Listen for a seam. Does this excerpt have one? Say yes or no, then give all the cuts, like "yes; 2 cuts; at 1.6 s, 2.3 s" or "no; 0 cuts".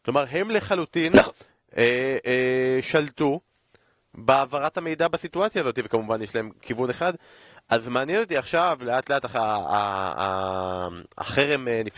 no; 0 cuts